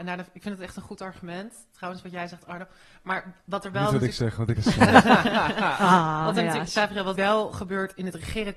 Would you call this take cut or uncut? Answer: cut